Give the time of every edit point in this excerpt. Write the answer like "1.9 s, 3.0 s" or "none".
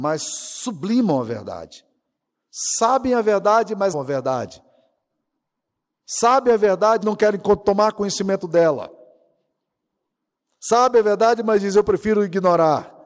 3.9 s, 7.0 s